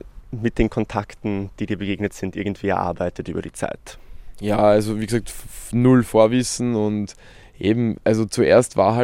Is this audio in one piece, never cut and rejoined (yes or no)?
yes